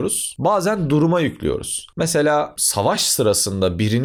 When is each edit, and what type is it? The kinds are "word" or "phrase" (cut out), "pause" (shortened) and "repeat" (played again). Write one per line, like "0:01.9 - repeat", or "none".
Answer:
none